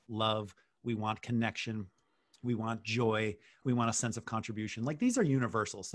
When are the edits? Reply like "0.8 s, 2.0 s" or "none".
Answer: none